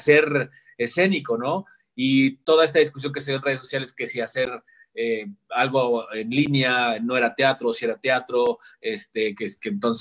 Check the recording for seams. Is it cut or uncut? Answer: uncut